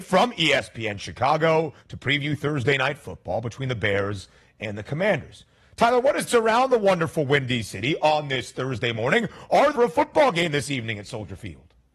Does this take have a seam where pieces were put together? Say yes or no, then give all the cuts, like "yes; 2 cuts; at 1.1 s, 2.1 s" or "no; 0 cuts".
yes; 3 cuts; at 1.8 s, 6.3 s, 9.7 s